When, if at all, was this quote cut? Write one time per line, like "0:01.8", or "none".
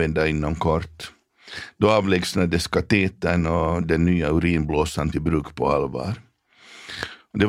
0:05.1